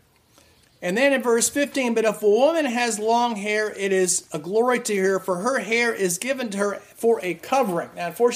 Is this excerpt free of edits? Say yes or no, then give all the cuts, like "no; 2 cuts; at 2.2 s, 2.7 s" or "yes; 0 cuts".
yes; 0 cuts